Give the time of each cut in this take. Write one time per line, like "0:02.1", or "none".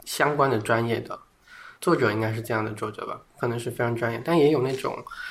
0:01.8